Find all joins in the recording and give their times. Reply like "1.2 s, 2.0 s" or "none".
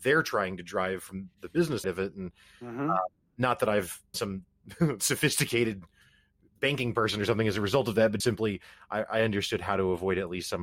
1.8 s, 4.1 s, 8.2 s